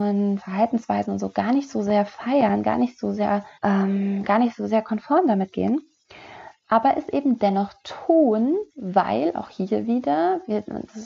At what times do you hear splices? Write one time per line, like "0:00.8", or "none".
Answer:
0:03.5
0:08.7